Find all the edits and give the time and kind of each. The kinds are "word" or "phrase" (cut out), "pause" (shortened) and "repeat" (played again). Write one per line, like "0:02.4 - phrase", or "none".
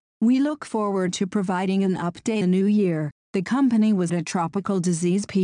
0:02.4 - word
0:04.1 - word